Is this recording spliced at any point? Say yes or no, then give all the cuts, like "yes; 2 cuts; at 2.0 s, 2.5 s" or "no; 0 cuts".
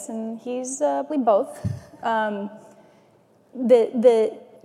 yes; 2 cuts; at 1.1 s, 3.5 s